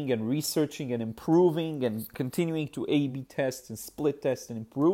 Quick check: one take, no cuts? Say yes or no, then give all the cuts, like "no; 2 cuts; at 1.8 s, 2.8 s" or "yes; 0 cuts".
yes; 0 cuts